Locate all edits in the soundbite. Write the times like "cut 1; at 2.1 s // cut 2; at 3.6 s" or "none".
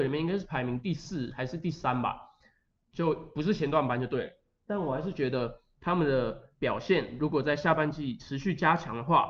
none